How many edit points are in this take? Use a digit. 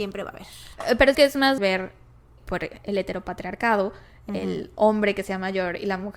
3